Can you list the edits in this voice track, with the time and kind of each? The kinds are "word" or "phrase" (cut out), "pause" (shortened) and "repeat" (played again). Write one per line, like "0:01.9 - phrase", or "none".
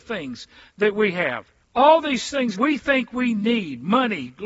0:01.6 - pause
0:02.5 - word